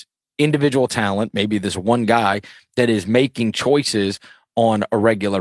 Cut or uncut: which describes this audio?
uncut